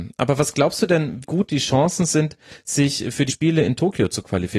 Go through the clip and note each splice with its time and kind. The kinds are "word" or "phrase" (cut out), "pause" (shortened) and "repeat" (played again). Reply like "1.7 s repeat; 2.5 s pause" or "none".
1.2 s word; 3.3 s word